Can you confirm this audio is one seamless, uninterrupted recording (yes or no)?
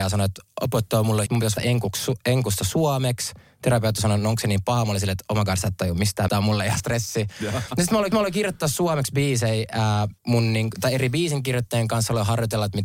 no